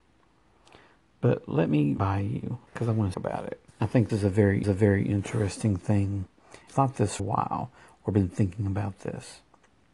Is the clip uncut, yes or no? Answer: no